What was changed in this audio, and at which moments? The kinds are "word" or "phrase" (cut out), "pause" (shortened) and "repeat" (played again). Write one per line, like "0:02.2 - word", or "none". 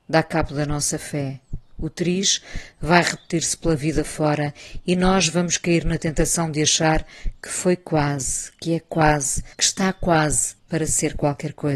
0:09.5 - pause
0:10.6 - pause